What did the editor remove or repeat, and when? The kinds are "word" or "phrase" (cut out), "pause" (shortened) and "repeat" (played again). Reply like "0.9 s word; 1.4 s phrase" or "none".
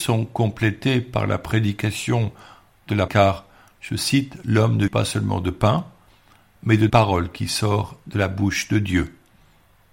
3.1 s word; 4.9 s word; 6.9 s word